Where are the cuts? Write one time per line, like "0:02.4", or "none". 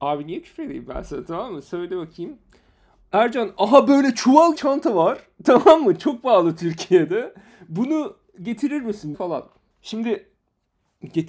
0:04.5
0:09.1